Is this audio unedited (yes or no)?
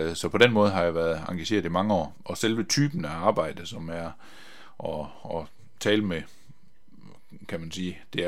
yes